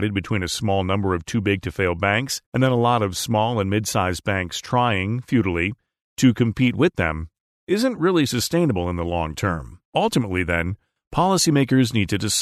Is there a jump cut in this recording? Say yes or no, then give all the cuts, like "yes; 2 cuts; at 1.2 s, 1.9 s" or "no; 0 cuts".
yes; 2 cuts; at 2.5 s, 9.8 s